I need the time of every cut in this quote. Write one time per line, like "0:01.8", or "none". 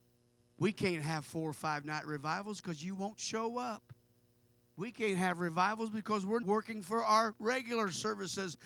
0:06.4

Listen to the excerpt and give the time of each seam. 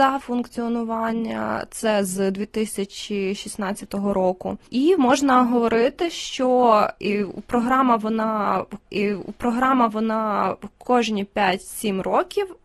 0:08.9

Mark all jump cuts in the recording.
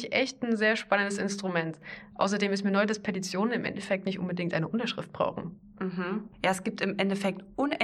0:06.3

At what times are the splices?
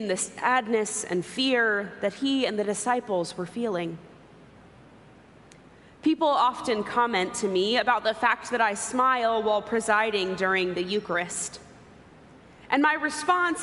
none

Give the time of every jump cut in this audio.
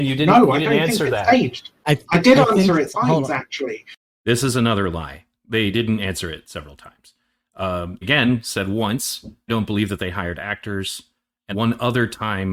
0:02.9
0:08.0
0:09.5
0:11.5

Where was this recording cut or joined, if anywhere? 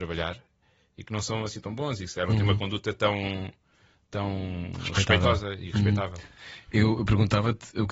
none

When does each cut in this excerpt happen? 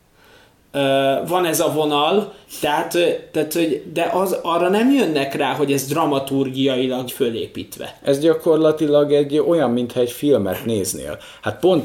0:07.1

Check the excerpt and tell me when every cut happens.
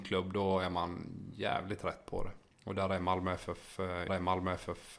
0:02.5
0:04.1

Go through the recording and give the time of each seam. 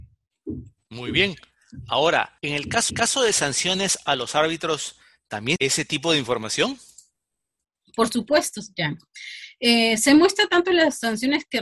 0:02.4
0:02.9
0:05.6

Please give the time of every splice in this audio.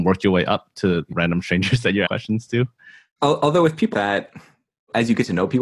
0:01.1
0:02.1
0:03.1
0:03.9

